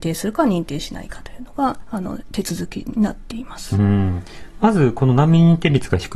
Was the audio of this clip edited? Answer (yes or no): no